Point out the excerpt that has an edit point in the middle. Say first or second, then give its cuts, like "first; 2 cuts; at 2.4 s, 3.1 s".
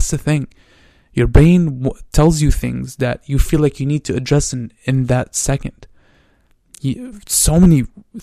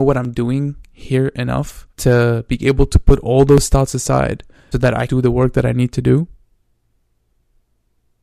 second; 3 cuts; at 1.9 s, 4.7 s, 5.1 s